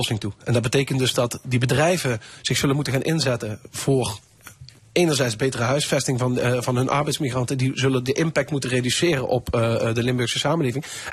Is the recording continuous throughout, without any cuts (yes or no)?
yes